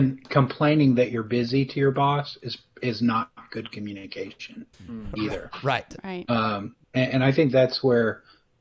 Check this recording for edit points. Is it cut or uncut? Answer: cut